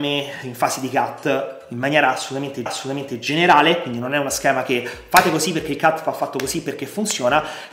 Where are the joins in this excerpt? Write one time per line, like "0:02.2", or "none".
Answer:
0:02.7